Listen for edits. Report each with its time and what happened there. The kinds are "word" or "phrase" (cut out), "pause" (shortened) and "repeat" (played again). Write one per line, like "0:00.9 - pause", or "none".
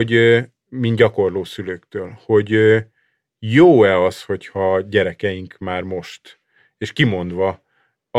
none